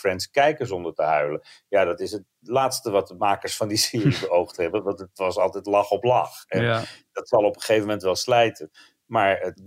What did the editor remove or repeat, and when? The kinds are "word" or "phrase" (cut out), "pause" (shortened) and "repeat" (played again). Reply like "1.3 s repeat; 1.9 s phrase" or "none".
none